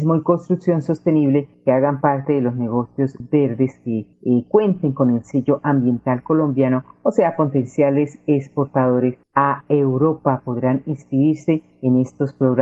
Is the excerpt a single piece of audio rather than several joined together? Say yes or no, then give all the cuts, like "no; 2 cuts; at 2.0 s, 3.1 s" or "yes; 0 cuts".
yes; 0 cuts